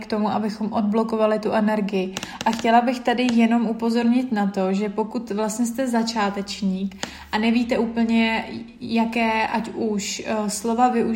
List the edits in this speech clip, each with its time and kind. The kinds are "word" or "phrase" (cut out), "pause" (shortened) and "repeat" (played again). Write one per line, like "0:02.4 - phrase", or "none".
none

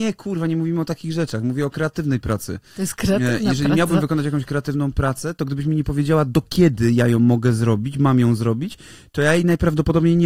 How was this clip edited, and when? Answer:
none

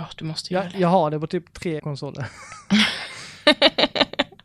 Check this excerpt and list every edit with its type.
0:01.8 - word

